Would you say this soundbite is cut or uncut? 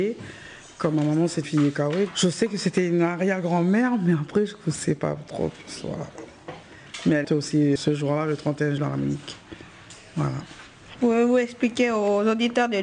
cut